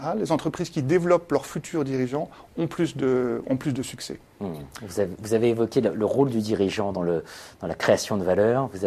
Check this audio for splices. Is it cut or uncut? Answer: uncut